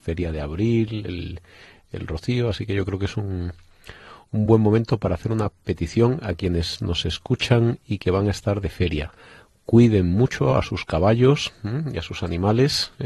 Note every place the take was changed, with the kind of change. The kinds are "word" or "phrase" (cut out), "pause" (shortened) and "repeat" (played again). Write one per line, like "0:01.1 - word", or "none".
none